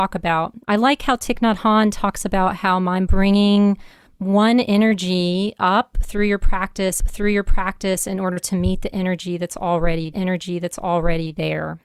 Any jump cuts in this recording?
yes; 3 cuts; at 3.1 s, 7.0 s, 10.1 s

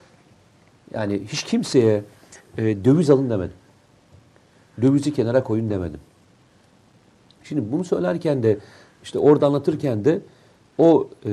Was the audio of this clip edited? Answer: no; 0 cuts

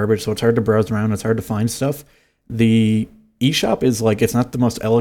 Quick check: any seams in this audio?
no; 0 cuts

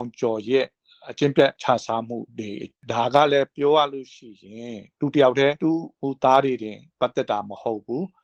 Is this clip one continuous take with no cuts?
no; 2 cuts; at 1.6 s, 2.3 s

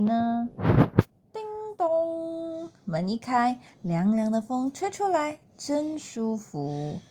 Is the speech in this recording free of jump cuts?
no; 1 cut; at 1.1 s

